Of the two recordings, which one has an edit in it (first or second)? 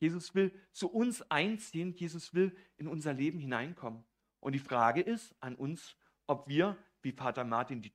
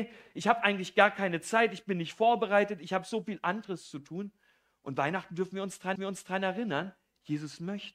second